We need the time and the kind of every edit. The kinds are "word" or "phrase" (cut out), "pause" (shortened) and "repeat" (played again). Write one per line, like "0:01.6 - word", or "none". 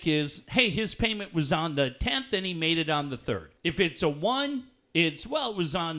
0:03.6 - pause